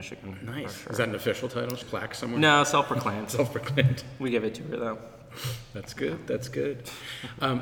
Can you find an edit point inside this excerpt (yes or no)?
yes